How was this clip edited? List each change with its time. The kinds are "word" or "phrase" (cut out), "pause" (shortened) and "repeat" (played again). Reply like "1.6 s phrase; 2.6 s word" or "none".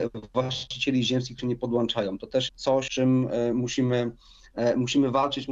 1.4 s word; 2.5 s word; 2.9 s word